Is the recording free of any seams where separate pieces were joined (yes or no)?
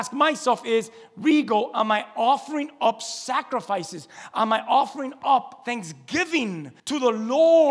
no